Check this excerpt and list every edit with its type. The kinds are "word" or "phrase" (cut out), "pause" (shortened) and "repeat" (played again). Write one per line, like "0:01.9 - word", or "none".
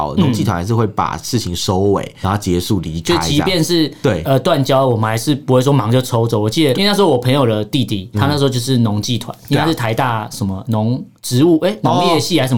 0:02.2 - word
0:06.7 - word
0:08.1 - word